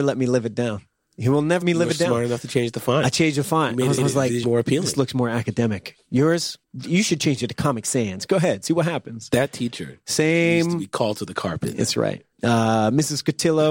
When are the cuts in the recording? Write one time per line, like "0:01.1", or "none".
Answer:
0:01.6
0:04.0
0:04.4
0:06.6
0:12.3

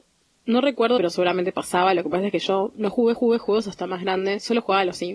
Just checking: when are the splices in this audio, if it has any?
0:01.0
0:03.1

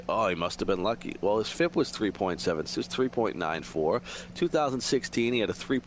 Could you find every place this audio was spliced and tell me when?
0:02.7

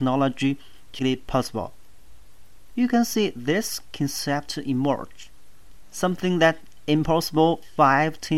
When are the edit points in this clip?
0:01.0

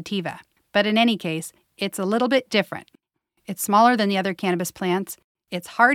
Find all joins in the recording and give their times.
none

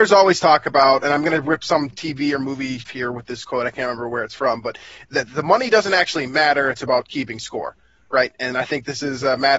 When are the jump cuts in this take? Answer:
0:02.8

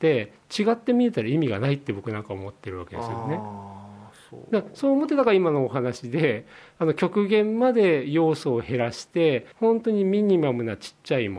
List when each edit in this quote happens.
0:09.5

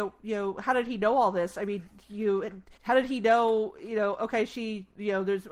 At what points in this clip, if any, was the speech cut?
0:02.8

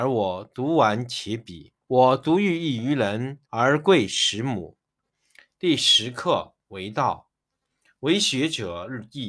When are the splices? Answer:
0:01.8
0:03.5

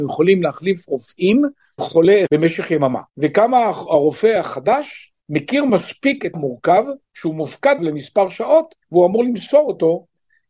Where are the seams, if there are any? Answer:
0:01.8
0:02.3
0:03.1
0:05.2
0:06.3
0:07.0
0:07.8
0:08.8

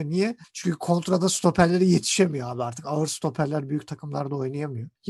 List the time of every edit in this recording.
none

